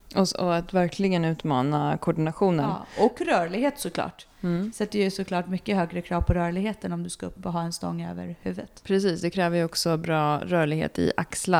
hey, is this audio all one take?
yes; 0 cuts

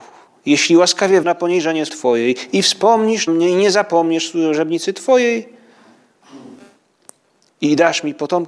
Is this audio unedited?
no; 3 cuts; at 1.2 s, 1.9 s, 3.3 s

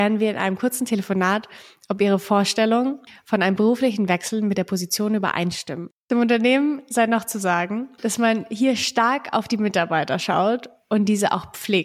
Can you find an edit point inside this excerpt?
no; 0 cuts

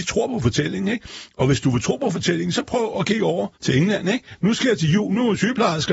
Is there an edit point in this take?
yes; 1 cut; at 3.5 s

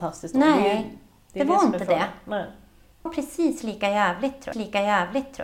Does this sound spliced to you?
yes; 2 cuts; at 3.1 s, 4.5 s

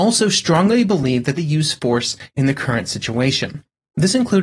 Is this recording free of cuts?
no; 1 cut; at 1.4 s

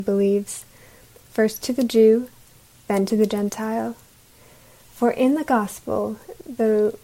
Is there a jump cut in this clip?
no; 0 cuts

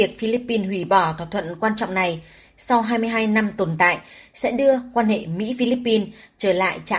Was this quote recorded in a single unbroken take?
yes; 0 cuts

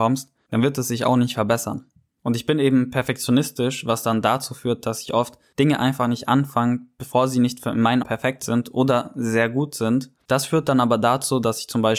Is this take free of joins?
no; 1 cut; at 8.0 s

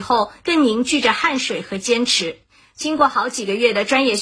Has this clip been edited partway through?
no; 0 cuts

